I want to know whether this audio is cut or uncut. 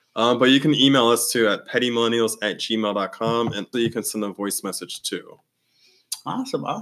cut